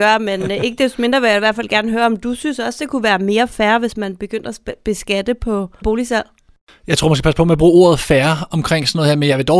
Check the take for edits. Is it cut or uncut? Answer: cut